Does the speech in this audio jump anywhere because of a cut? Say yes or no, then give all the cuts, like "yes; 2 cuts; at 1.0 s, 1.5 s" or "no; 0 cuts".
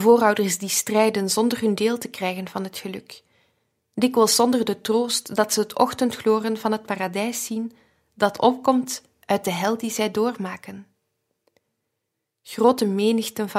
no; 0 cuts